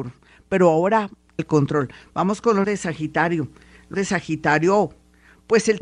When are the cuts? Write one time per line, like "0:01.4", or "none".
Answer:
0:01.4
0:02.6
0:03.9

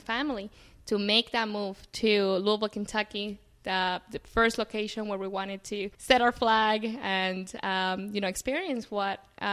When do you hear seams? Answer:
0:05.9

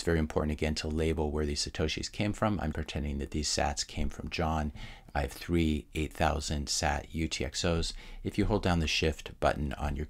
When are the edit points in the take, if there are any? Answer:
0:02.7

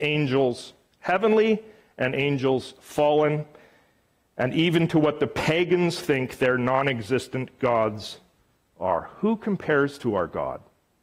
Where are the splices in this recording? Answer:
none

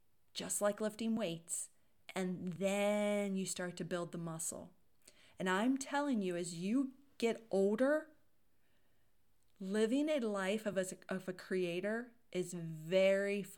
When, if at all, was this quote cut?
none

